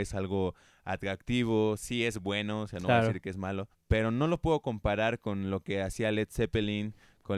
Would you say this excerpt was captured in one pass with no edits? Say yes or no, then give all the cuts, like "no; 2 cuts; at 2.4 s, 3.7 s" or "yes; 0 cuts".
no; 1 cut; at 3.7 s